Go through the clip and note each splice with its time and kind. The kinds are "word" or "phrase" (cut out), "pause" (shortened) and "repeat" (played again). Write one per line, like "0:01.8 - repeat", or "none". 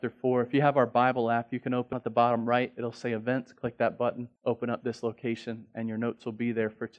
0:01.9 - phrase
0:04.4 - pause